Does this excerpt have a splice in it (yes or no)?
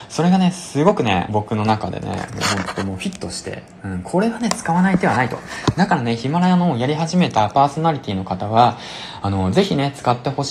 yes